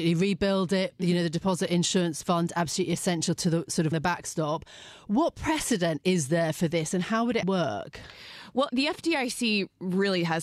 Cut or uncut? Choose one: cut